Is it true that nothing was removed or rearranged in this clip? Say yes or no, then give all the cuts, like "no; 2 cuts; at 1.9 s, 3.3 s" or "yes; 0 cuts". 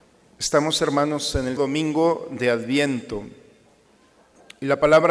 no; 1 cut; at 1.6 s